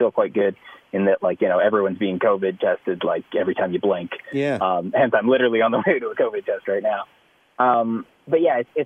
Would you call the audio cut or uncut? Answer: uncut